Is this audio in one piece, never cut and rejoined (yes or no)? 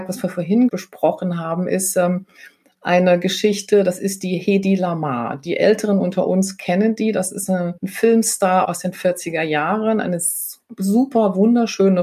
no